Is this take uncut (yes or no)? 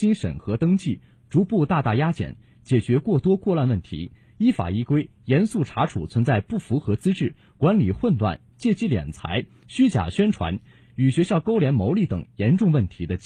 yes